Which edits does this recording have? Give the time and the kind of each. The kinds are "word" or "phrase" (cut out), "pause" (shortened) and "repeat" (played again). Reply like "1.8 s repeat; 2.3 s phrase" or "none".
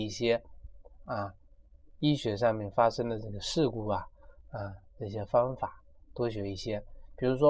none